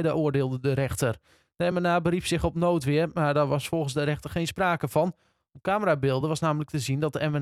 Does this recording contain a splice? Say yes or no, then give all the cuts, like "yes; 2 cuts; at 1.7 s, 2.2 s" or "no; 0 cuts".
no; 0 cuts